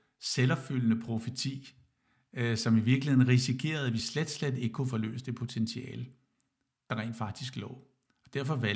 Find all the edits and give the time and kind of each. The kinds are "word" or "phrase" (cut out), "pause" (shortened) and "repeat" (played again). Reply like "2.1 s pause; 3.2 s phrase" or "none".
none